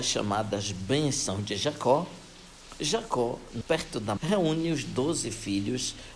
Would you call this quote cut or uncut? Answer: cut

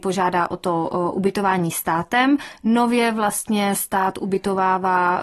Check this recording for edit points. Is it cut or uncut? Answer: uncut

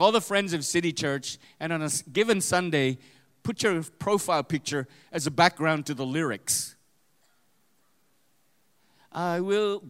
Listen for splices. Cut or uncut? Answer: uncut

